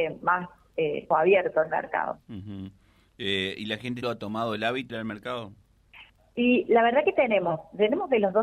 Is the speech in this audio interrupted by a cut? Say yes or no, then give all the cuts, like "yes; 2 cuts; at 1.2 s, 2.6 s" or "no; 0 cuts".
yes; 5 cuts; at 1.1 s, 2.2 s, 4.0 s, 4.9 s, 5.9 s